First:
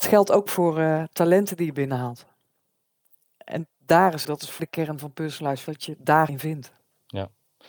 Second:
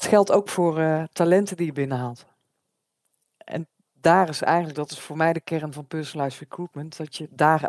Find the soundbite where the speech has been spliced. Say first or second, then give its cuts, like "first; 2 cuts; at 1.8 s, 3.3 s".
first; 5 cuts; at 3.7 s, 4.2 s, 4.6 s, 5.7 s, 6.3 s